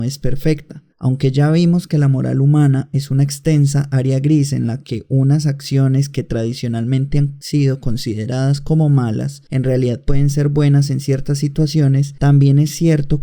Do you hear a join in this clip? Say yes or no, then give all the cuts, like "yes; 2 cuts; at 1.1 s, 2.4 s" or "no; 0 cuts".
no; 0 cuts